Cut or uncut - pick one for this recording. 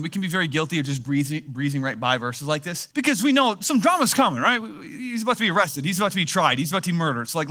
cut